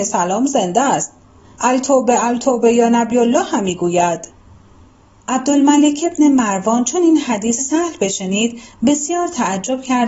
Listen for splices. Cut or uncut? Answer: cut